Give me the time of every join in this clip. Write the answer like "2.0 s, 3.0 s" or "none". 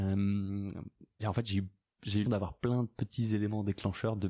1.2 s, 2.2 s

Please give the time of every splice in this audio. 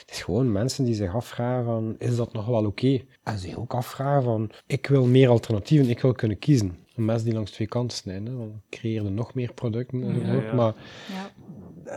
3.2 s, 4.6 s, 6.8 s

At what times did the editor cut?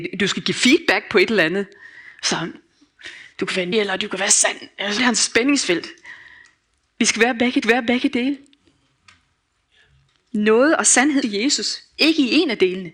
3.7 s, 5.0 s, 7.6 s, 11.2 s

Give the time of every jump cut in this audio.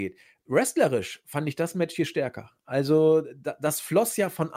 none

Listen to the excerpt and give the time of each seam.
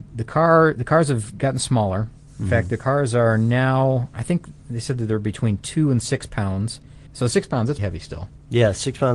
7.1 s, 7.8 s

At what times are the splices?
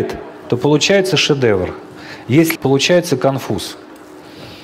2.6 s

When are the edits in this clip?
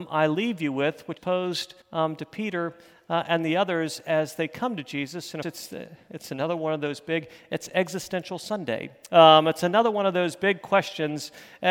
1.2 s, 1.8 s, 5.4 s

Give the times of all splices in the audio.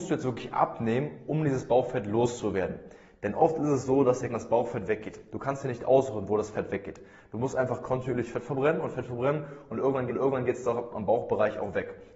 4.3 s, 10.1 s

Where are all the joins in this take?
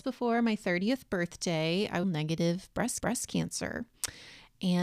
2.0 s, 3.0 s

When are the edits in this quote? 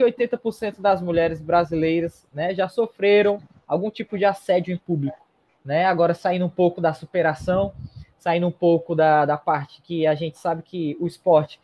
none

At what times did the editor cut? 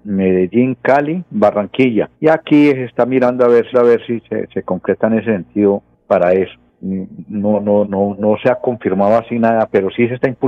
2.1 s, 3.7 s, 7.8 s

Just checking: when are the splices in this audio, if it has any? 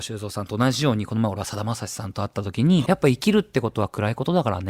2.9 s

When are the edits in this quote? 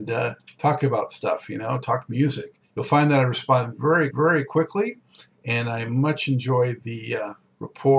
2.6 s, 4.1 s

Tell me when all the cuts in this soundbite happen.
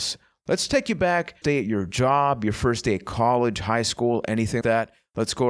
1.4 s, 4.6 s

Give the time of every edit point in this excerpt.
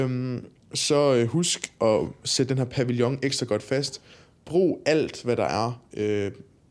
none

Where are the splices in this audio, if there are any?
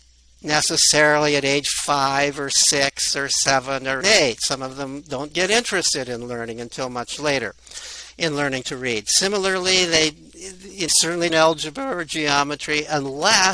4.0 s, 10.9 s, 11.3 s

